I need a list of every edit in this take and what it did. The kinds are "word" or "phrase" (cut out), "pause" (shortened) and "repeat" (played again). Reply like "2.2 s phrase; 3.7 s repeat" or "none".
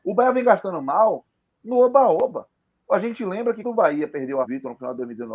3.6 s word; 4.4 s word

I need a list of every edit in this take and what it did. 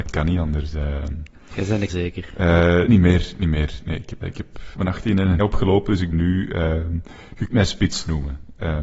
1.9 s word; 2.9 s word; 4.2 s word; 4.7 s word; 5.4 s word; 6.1 s word; 7.5 s word

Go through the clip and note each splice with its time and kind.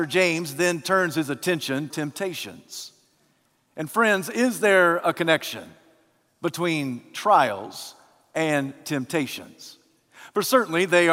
1.9 s word

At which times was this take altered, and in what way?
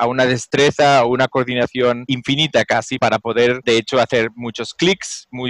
none

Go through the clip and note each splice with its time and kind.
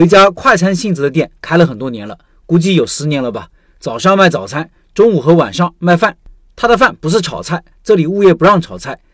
none

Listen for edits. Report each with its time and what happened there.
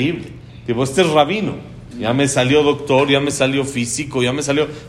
none

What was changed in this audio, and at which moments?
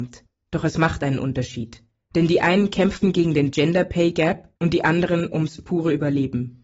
2.0 s pause; 4.6 s pause

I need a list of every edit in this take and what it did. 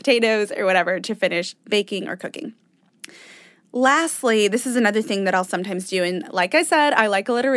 none

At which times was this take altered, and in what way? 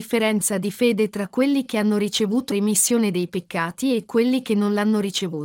2.5 s word

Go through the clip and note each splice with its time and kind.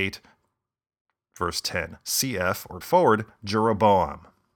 2.8 s word

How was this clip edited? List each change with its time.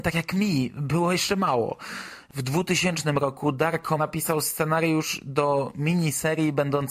4.0 s word

